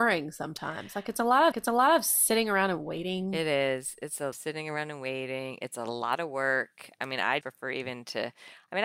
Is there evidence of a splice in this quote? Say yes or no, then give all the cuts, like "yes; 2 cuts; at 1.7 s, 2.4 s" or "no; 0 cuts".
yes; 3 cuts; at 1.5 s, 4.3 s, 7.4 s